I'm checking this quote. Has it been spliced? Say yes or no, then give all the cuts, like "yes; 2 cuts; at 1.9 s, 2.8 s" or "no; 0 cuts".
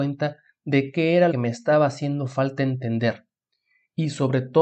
yes; 1 cut; at 1.3 s